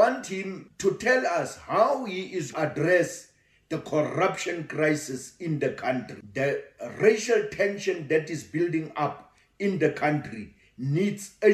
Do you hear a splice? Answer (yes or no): yes